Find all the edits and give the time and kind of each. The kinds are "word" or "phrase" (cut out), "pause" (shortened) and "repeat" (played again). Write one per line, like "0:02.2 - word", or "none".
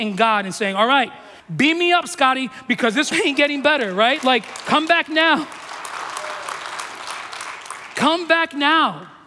0:01.4 - phrase
0:03.1 - word
0:04.2 - word